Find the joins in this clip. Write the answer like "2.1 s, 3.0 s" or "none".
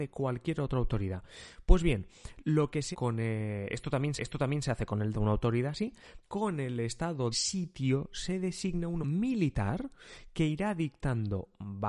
2.9 s, 4.2 s, 5.1 s, 6.2 s, 7.3 s, 9.0 s